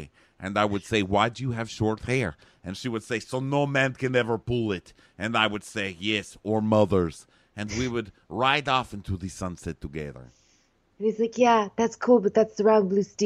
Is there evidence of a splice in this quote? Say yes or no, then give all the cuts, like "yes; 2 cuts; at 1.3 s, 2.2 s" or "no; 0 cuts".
no; 0 cuts